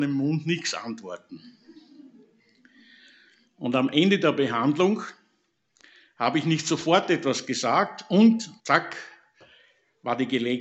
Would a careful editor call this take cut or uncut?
cut